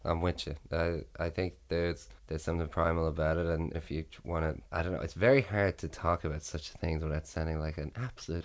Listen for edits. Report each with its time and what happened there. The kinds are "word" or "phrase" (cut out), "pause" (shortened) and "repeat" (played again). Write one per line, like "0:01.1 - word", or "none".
0:02.2 - pause
0:02.7 - word
0:03.7 - word
0:04.7 - pause

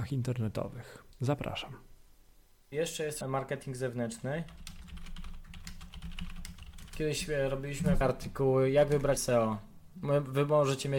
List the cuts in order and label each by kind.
0:01.1 - pause
0:03.2 - phrase
0:08.0 - phrase
0:09.2 - word

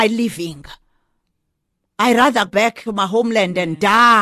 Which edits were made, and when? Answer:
0:02.5 - word
0:02.9 - word

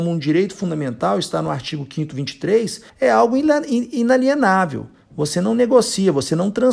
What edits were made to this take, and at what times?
0:02.9 - pause

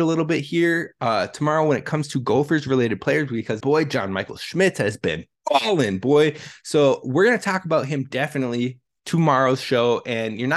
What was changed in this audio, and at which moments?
0:03.6 - word

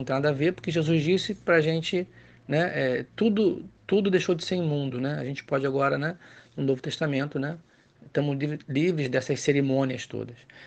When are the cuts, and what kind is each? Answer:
none

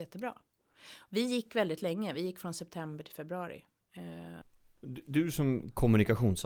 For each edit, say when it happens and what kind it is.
none

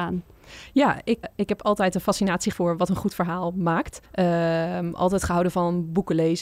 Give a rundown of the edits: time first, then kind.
0:01.2 - word
0:02.5 - word
0:04.1 - pause

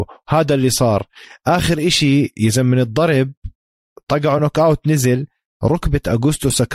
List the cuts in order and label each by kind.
none

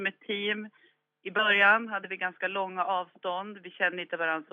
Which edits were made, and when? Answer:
none

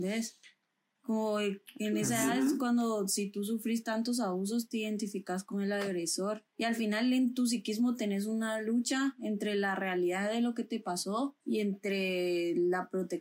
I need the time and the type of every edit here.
0:06.5 - pause
0:11.4 - pause

